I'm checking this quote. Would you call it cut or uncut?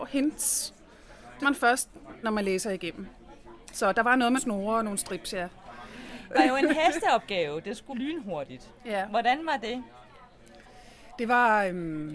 cut